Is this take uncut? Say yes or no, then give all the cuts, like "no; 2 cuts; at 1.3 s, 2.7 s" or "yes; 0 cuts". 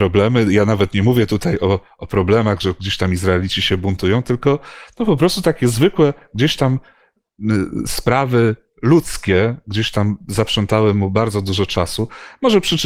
yes; 0 cuts